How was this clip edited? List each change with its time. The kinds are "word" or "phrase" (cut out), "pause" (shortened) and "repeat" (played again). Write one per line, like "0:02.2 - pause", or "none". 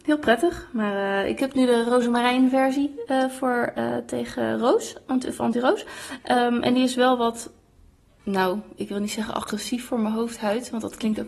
none